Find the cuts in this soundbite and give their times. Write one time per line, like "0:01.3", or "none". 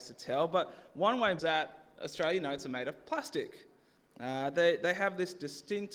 0:01.4